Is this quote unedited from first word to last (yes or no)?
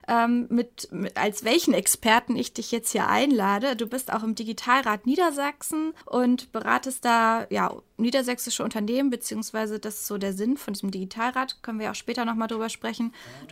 no